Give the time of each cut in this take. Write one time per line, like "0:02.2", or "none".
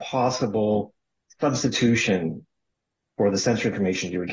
none

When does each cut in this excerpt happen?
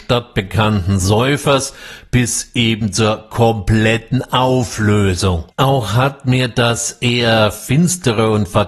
0:05.5

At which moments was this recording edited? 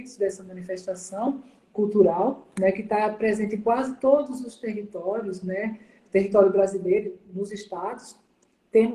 none

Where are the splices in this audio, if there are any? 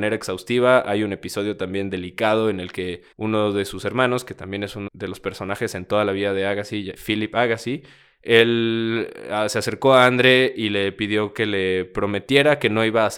0:03.1
0:04.9
0:07.0

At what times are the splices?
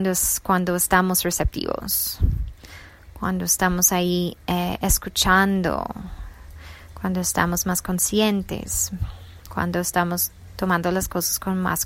none

